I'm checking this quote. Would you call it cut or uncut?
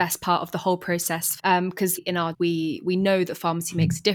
cut